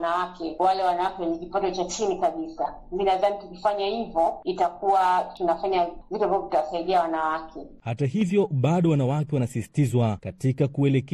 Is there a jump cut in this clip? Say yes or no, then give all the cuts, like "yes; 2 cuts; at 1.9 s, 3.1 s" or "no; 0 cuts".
no; 0 cuts